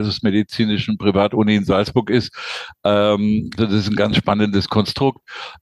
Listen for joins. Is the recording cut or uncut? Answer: cut